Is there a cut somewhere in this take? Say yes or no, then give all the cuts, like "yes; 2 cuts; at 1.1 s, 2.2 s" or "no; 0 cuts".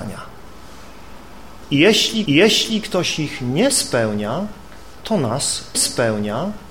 yes; 2 cuts; at 2.3 s, 5.7 s